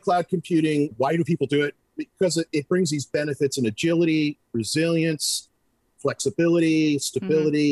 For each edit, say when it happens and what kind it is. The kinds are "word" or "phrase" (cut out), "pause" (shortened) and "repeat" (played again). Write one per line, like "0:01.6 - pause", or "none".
none